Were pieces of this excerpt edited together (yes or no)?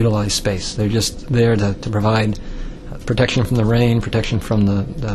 no